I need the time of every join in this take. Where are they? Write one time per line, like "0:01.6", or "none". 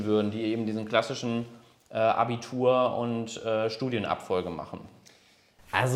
none

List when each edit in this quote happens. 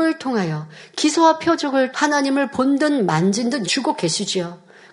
0:01.9
0:03.6

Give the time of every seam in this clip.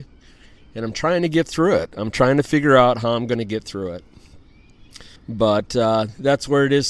0:05.2

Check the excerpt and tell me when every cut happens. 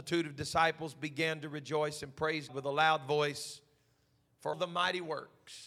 0:02.5
0:04.5

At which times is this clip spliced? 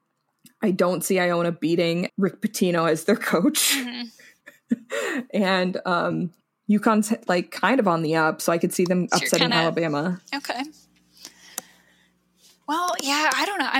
0:02.1
0:06.4

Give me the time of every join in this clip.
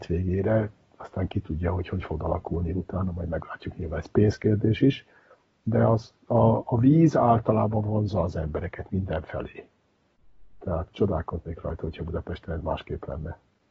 none

